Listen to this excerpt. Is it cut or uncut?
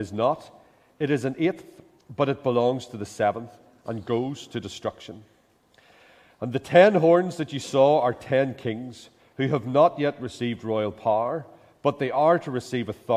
uncut